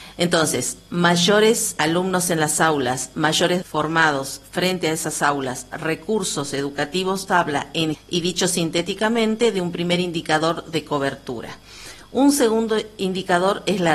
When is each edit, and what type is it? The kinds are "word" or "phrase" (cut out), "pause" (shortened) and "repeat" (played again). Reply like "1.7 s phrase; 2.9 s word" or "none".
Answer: 1.8 s word; 3.6 s word; 7.3 s word; 7.9 s word